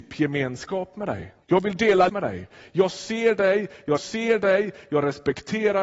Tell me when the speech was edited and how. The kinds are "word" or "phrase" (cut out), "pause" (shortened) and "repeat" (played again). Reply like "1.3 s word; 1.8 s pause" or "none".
1.4 s pause; 2.1 s word; 4.0 s repeat